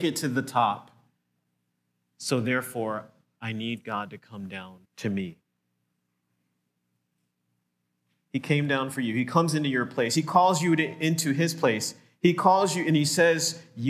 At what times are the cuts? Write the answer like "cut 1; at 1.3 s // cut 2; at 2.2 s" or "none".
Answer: cut 1; at 4.8 s